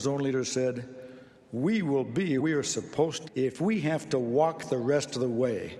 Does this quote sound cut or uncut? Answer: cut